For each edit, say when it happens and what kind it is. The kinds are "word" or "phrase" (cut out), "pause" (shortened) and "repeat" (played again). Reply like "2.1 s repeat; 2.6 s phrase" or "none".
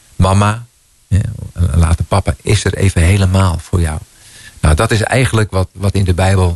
none